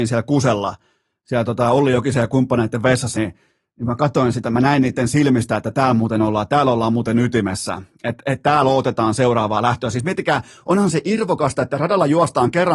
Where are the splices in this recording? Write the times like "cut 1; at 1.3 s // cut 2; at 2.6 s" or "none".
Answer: cut 1; at 3.1 s